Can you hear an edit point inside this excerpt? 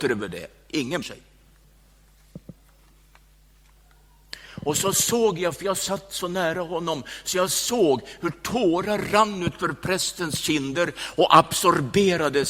yes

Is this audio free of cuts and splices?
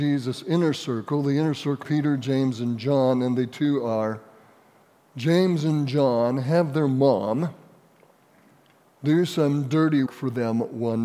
no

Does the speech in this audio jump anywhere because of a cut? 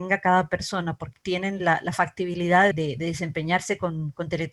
yes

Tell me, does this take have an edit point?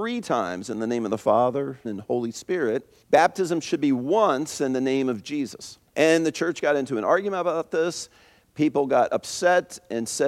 yes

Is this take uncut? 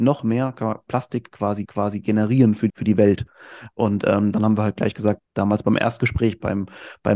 no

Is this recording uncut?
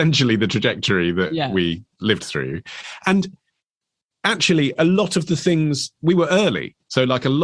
yes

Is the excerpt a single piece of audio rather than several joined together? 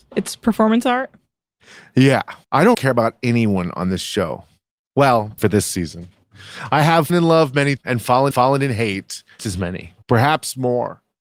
no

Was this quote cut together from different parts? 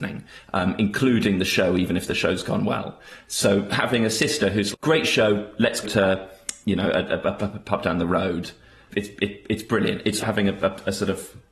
yes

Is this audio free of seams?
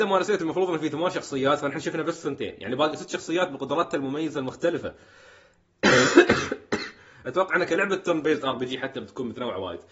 yes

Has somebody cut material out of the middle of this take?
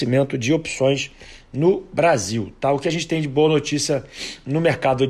no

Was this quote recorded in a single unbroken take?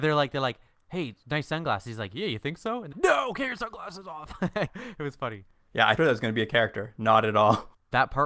no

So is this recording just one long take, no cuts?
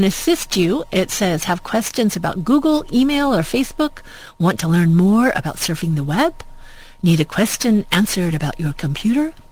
yes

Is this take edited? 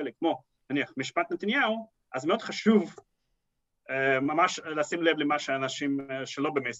no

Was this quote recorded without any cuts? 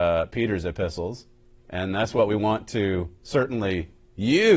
yes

